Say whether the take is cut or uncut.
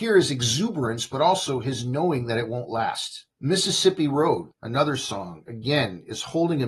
cut